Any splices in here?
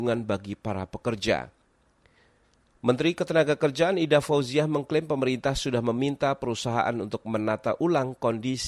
no; 0 cuts

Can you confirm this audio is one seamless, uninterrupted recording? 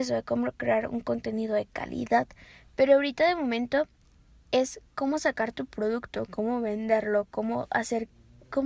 yes; 0 cuts

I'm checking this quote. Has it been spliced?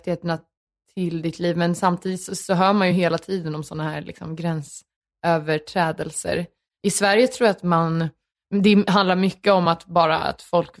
no; 0 cuts

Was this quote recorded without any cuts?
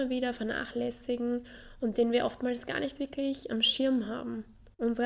yes; 0 cuts

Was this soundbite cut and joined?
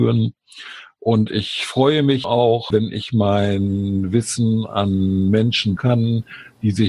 yes; 3 cuts; at 2.2 s, 2.7 s, 5.8 s

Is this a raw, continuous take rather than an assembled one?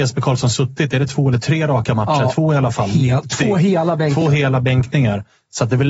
yes; 0 cuts

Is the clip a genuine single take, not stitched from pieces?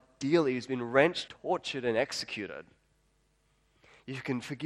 no; 1 cut; at 1.3 s

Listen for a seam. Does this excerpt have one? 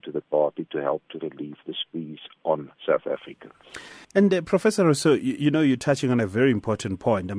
yes; 2 cuts; at 2.8 s, 4.0 s

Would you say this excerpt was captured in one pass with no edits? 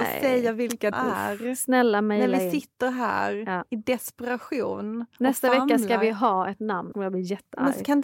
no; 2 cuts; at 0.9 s, 6.9 s

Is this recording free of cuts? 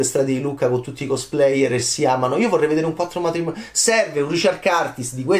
yes; 0 cuts

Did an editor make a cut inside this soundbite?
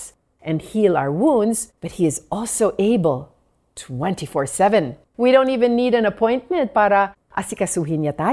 yes; 2 cuts; at 1.8 s, 5.1 s

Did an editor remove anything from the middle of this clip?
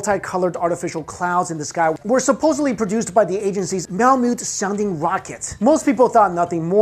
no; 0 cuts

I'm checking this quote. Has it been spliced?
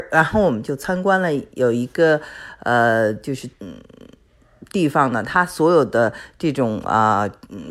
yes; 1 cut; at 3.5 s

